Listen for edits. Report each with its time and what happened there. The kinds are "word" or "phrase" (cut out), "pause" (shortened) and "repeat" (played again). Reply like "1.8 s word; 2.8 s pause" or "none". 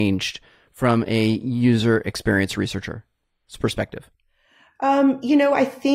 none

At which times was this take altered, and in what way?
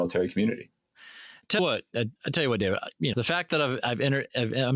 1.6 s word; 2.2 s pause; 3.1 s word

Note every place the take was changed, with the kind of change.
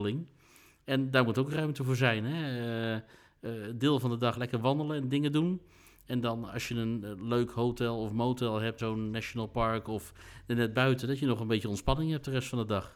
4.3 s word; 8.8 s word

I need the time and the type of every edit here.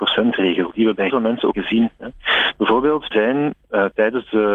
1.1 s word; 1.5 s word; 3.1 s word

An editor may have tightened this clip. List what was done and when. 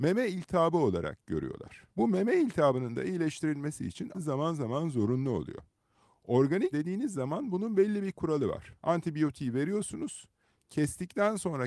1.9 s pause; 4.1 s phrase; 6.7 s word; 8.8 s pause

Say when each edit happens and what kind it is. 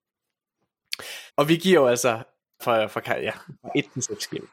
1.3 s pause; 2.6 s phrase

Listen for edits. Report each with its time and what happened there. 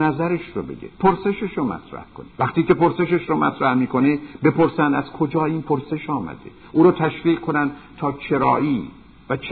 0.9 s pause; 2.3 s pause

